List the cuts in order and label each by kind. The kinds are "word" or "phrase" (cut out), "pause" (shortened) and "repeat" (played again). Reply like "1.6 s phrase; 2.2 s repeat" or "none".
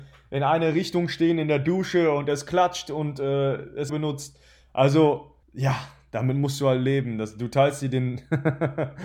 3.9 s phrase; 5.4 s pause